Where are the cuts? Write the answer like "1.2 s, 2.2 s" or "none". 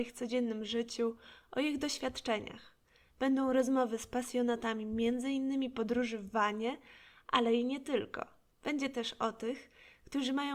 none

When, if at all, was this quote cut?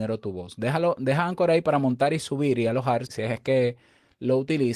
3.1 s

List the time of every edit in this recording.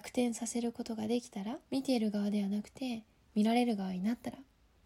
1.7 s

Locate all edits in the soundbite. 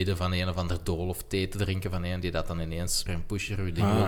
3.1 s

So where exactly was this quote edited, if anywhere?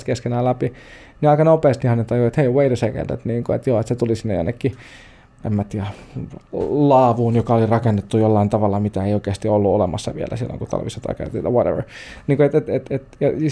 none

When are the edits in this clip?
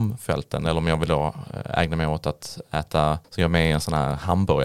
3.2 s

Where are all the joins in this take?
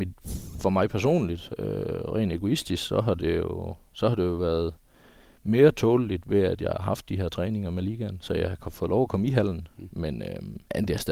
none

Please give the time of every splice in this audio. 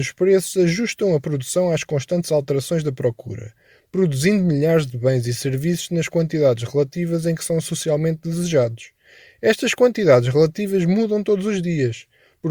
none

